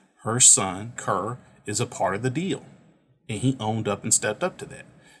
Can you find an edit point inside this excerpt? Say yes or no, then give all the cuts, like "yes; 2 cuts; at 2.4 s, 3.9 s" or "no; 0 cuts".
yes; 1 cut; at 1.0 s